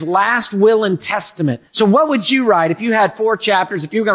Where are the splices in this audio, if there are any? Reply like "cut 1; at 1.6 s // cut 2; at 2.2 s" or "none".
cut 1; at 1.7 s